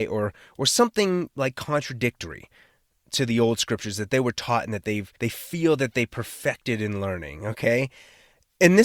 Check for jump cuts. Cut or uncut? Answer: cut